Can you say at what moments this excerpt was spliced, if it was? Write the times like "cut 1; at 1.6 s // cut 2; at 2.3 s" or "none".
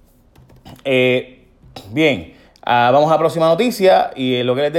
cut 1; at 2.5 s